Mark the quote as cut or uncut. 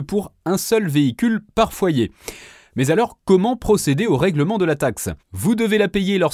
uncut